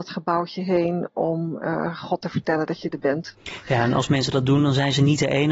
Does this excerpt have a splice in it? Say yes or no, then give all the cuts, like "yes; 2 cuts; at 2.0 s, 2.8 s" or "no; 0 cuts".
no; 0 cuts